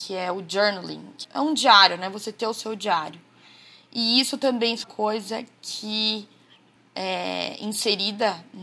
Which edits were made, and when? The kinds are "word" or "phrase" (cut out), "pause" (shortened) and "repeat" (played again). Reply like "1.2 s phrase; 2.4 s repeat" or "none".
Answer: 1.2 s word; 4.8 s word; 6.8 s word